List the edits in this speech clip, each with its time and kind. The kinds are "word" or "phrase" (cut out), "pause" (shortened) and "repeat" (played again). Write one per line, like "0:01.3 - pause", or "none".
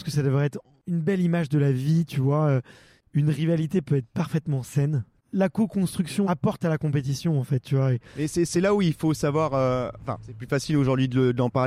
0:10.2 - word